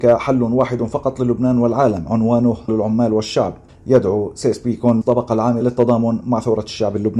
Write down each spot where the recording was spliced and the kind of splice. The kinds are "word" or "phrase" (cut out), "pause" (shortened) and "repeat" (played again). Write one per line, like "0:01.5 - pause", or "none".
0:02.7 - word
0:03.7 - pause
0:05.0 - word
0:05.6 - word